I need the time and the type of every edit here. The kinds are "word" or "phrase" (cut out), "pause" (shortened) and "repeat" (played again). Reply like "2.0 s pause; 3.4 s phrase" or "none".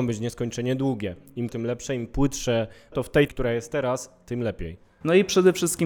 1.5 s word; 2.9 s word; 3.3 s word